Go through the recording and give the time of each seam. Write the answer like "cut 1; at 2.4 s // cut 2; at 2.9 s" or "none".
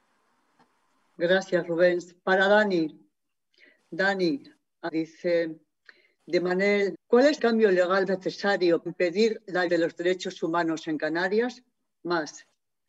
cut 1; at 4.9 s // cut 2; at 6.9 s // cut 3; at 7.4 s // cut 4; at 8.1 s // cut 5; at 8.9 s // cut 6; at 9.7 s

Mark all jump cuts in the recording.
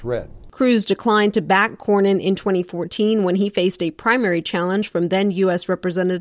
none

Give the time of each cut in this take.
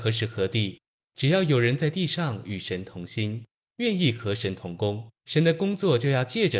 cut 1; at 5.2 s

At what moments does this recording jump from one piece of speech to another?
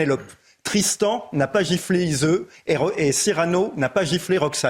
none

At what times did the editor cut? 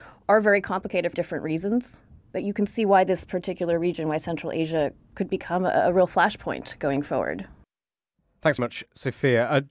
cut 1; at 1.1 s // cut 2; at 8.6 s

